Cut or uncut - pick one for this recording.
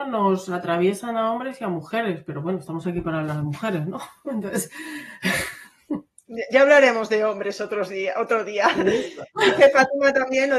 uncut